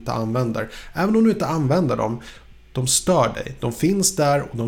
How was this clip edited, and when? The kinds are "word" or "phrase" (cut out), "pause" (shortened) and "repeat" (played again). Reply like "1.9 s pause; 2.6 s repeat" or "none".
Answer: none